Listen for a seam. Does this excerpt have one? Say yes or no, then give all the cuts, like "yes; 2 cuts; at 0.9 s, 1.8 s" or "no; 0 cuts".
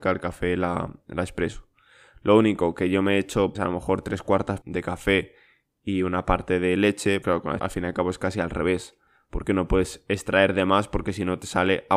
yes; 4 cuts; at 3.5 s, 4.6 s, 7.2 s, 7.6 s